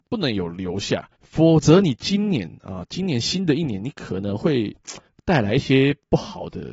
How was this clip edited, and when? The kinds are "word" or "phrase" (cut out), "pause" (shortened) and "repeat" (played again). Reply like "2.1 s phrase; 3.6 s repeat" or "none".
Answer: 1.1 s pause; 5.0 s pause